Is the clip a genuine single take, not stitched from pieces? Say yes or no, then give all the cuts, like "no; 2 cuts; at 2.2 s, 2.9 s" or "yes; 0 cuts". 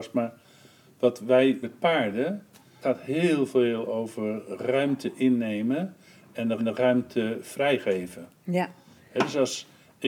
no; 3 cuts; at 1.6 s, 2.8 s, 6.6 s